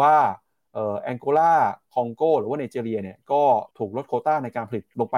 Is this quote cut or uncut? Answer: cut